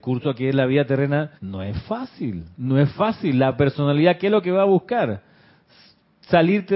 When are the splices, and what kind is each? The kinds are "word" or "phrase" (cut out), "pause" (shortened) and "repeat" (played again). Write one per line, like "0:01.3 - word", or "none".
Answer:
0:01.4 - pause
0:02.5 - pause